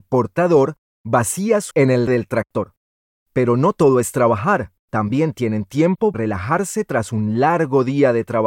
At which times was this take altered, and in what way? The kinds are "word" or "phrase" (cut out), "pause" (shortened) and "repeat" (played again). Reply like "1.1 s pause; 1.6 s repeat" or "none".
1.7 s word; 2.1 s word; 3.0 s pause; 4.8 s pause; 6.1 s word